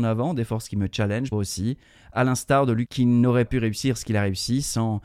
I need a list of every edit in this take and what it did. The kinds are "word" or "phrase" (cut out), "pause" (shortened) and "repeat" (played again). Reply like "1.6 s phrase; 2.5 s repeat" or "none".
1.3 s word; 2.9 s word; 3.5 s word